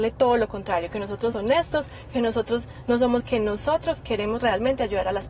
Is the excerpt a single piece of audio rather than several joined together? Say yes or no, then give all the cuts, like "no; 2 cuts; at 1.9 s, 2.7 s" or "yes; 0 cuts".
no; 2 cuts; at 1.3 s, 3.2 s